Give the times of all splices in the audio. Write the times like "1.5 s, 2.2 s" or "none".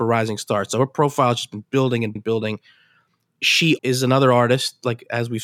2.2 s, 3.8 s